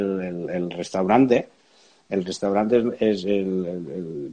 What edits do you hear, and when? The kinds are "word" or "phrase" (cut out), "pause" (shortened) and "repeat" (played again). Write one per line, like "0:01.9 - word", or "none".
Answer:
none